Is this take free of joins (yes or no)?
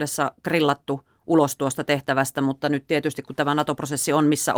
yes